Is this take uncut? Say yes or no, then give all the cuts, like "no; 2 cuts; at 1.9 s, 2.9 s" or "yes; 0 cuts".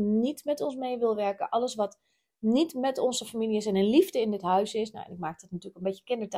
yes; 0 cuts